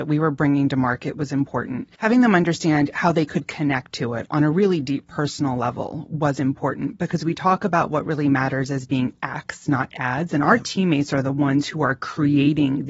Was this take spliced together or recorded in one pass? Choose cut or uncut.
cut